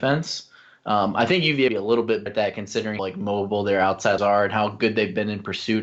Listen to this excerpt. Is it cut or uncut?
cut